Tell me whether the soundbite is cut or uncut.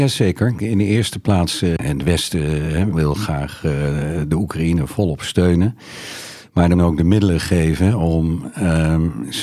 cut